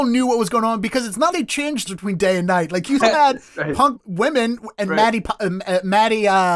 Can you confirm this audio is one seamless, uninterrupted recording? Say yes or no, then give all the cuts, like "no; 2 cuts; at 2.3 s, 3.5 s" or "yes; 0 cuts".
no; 4 cuts; at 1.3 s, 1.9 s, 3.0 s, 3.9 s